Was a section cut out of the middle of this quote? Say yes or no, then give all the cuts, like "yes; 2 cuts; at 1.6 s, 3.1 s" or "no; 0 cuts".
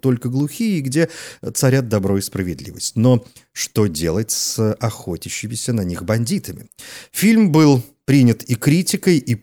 no; 0 cuts